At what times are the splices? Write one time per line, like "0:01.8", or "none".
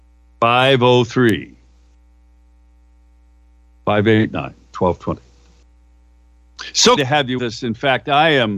0:07.0
0:07.4